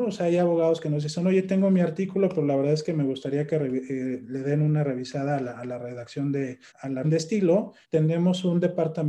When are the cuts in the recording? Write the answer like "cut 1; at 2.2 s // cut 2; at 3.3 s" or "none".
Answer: cut 1; at 6.7 s // cut 2; at 7.0 s // cut 3; at 7.8 s